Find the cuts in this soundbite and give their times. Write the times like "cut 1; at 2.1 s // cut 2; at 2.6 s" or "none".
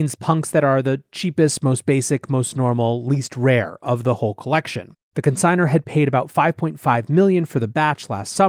cut 1; at 5.0 s